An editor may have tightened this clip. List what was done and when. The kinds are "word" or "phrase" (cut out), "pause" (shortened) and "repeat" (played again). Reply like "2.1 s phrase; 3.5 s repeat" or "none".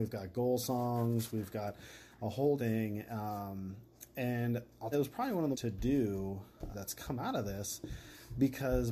2.6 s word; 4.9 s phrase; 5.5 s phrase; 6.7 s word

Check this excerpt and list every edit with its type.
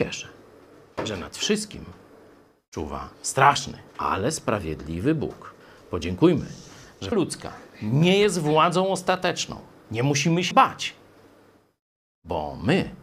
3.9 s pause; 5.6 s pause; 7.1 s word; 10.5 s word

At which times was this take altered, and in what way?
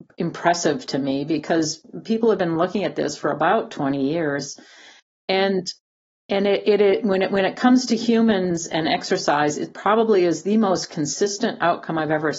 none

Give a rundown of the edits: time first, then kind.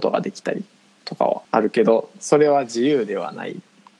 1.4 s pause

